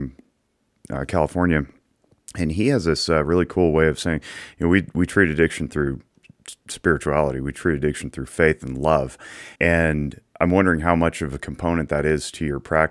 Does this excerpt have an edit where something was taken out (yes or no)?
yes